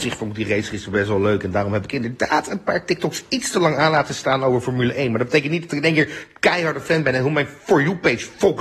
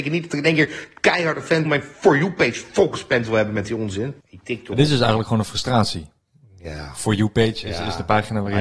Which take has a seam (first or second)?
second